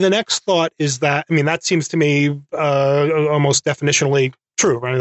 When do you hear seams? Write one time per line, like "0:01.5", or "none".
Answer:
none